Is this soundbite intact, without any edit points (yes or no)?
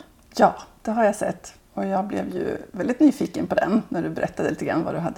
no